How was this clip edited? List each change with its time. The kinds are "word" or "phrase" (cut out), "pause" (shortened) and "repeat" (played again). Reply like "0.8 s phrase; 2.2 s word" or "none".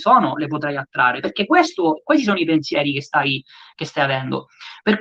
none

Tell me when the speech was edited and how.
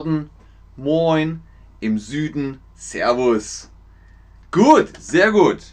none

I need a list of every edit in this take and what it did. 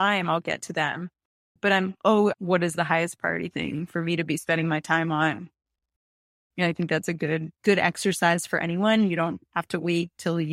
2.3 s phrase; 7.6 s pause

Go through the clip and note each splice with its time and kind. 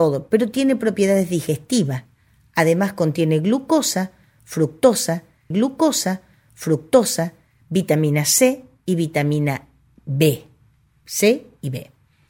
5.5 s repeat

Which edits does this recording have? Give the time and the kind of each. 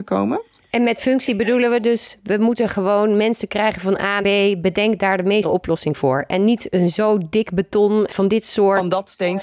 4.2 s word; 5.4 s word; 8.1 s word

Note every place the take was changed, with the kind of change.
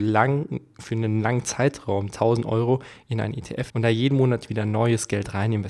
2.1 s word; 3.7 s word

